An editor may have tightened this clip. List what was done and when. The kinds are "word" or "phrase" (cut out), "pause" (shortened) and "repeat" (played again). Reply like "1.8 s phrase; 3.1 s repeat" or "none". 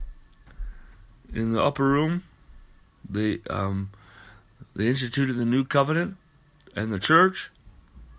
none